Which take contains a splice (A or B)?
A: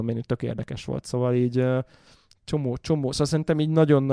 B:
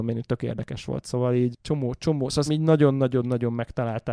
B